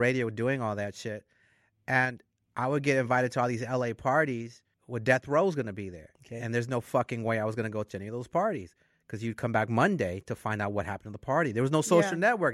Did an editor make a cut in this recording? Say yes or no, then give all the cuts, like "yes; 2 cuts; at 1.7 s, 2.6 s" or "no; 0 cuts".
no; 0 cuts